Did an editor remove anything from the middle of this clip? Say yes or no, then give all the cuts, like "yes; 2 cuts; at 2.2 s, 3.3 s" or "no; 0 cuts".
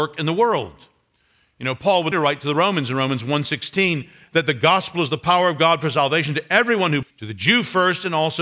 yes; 2 cuts; at 2.1 s, 7.0 s